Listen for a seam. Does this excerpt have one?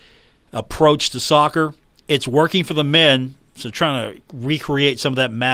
no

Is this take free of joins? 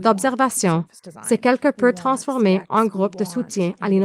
yes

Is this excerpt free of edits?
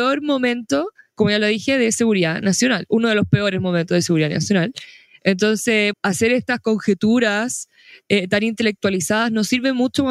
no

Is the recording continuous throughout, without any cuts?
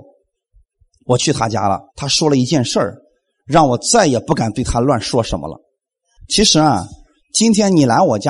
no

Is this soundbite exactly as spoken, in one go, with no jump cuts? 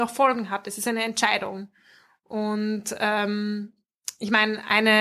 yes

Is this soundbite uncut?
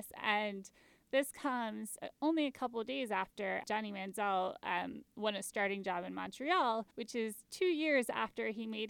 no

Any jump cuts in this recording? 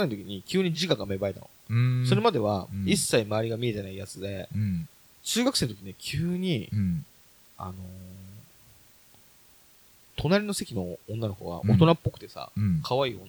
no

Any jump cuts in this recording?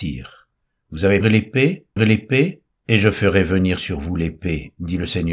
yes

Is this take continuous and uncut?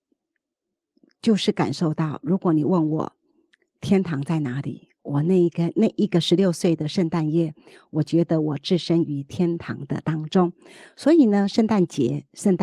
yes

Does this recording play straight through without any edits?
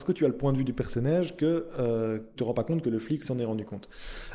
no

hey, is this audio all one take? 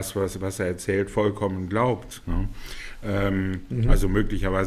yes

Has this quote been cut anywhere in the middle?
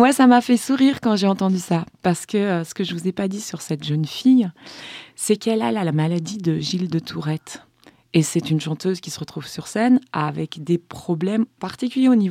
no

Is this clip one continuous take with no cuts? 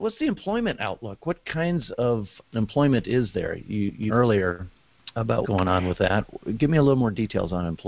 no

